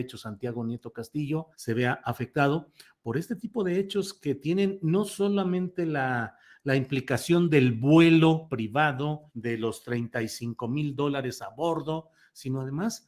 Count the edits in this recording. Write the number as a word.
two